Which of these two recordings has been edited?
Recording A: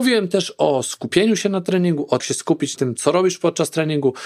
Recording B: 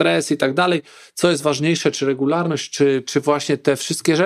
A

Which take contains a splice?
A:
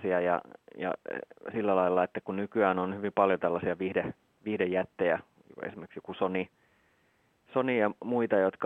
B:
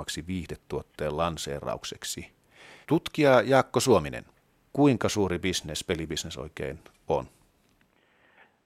B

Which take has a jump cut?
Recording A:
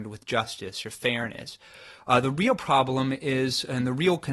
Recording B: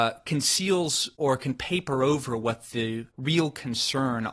B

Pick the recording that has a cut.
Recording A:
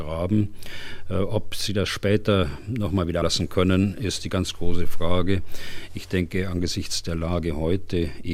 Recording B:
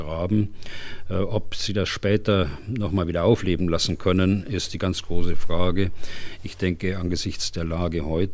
A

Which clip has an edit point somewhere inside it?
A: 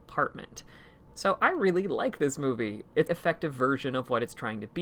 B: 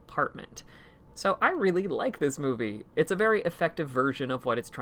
A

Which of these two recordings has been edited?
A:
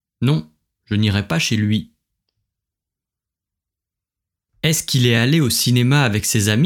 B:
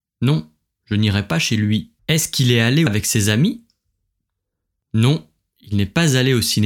B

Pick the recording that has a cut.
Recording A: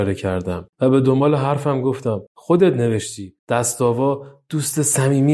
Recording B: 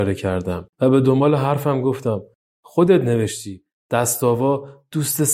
A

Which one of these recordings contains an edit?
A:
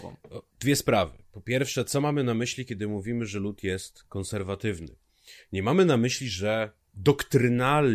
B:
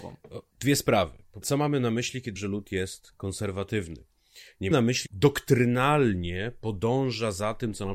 B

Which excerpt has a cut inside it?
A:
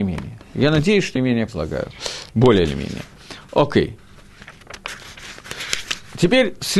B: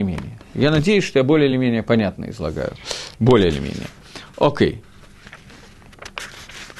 A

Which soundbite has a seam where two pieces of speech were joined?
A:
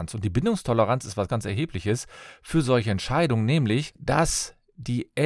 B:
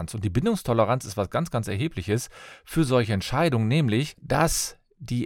A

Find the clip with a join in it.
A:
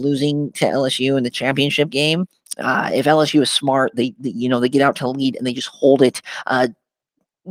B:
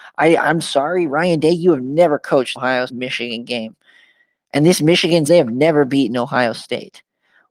B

